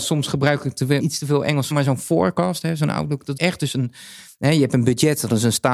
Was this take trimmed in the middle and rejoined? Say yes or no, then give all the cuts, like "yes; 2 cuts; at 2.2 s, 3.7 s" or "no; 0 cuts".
yes; 3 cuts; at 1.0 s, 1.7 s, 3.4 s